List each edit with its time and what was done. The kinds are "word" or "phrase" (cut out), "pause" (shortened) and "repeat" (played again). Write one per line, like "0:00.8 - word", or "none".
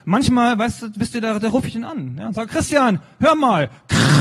none